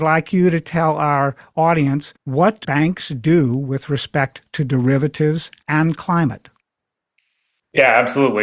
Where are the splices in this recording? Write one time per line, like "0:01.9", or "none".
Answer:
0:02.2
0:02.6